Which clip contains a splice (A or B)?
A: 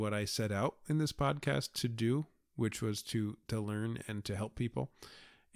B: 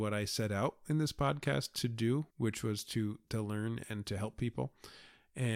B